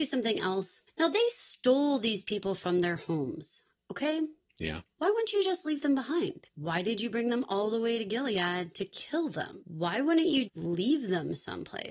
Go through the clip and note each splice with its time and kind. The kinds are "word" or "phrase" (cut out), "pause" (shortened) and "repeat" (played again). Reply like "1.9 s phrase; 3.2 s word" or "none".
10.5 s word

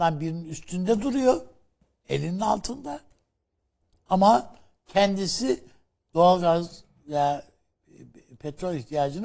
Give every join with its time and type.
none

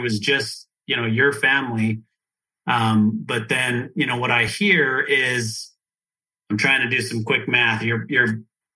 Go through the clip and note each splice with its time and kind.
none

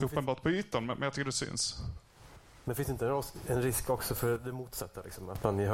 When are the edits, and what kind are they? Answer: none

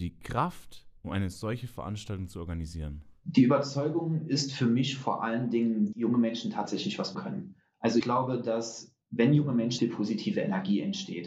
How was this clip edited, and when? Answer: 1.0 s pause; 5.9 s phrase; 7.1 s word; 8.0 s word; 9.0 s pause; 9.8 s phrase

